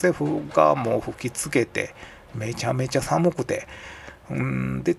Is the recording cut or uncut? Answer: uncut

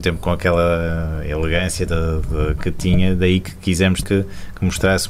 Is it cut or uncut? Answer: cut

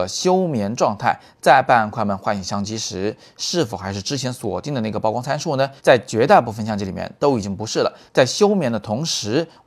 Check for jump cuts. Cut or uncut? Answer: cut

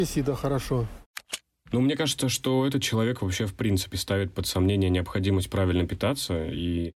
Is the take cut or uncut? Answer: uncut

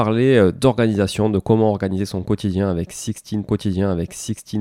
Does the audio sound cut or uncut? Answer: cut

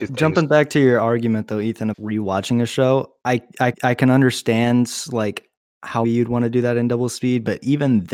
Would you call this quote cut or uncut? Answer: cut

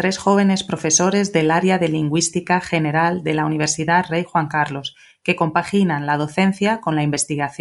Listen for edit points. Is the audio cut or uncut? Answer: uncut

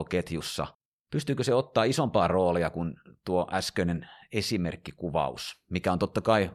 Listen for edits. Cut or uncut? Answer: uncut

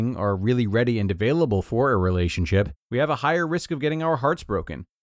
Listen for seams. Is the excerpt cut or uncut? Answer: cut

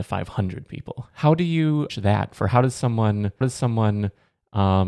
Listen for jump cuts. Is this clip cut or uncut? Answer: cut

